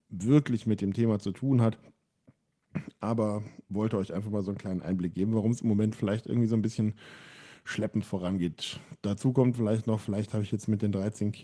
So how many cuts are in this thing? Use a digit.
1